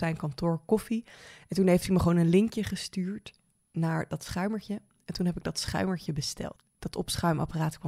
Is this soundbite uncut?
yes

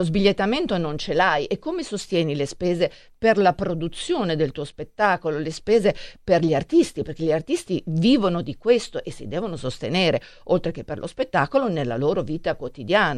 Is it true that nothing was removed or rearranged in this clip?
yes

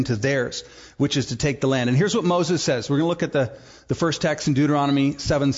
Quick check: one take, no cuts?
yes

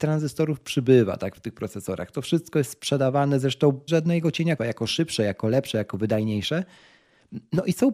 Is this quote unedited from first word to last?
no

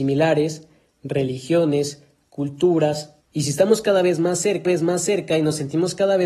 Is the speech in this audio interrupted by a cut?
yes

